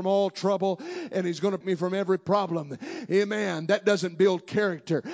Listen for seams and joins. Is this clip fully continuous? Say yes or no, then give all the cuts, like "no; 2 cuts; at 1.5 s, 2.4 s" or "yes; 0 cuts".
no; 1 cut; at 1.6 s